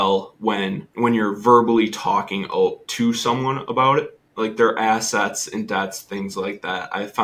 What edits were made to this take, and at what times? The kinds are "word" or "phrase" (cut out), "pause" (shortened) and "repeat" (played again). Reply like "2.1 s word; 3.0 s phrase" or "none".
0.9 s pause